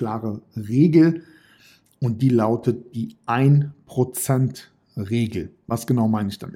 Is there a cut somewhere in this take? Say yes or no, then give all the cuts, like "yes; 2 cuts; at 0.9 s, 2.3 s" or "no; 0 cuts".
no; 0 cuts